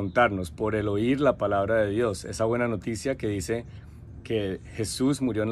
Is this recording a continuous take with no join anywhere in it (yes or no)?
yes